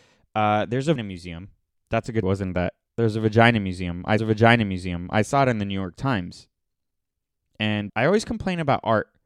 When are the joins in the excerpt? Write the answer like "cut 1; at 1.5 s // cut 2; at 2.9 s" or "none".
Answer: cut 1; at 1.0 s // cut 2; at 1.7 s // cut 3; at 2.2 s // cut 4; at 2.9 s // cut 5; at 4.2 s // cut 6; at 7.9 s